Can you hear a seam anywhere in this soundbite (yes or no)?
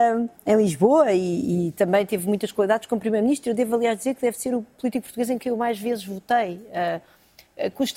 no